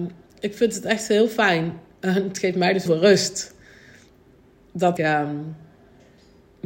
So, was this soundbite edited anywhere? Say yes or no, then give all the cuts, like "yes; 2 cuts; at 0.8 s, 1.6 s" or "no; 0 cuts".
yes; 2 cuts; at 2.9 s, 5.0 s